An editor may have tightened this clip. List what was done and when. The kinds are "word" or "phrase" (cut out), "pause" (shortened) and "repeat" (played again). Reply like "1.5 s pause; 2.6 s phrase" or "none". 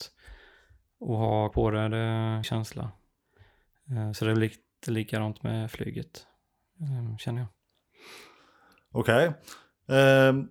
1.5 s word; 2.4 s word